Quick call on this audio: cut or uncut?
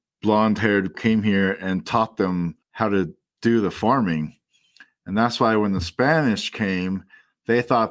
cut